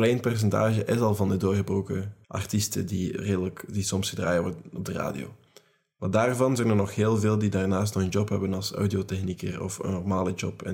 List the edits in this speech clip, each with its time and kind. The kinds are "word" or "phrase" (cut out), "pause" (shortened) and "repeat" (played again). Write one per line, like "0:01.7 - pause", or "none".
0:02.2 - pause